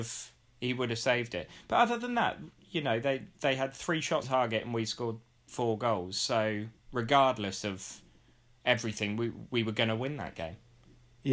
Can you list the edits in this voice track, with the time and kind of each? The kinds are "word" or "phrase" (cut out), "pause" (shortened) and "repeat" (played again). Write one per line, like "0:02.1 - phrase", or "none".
0:04.2 - word